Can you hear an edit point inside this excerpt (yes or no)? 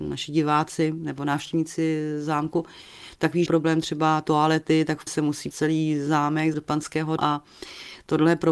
yes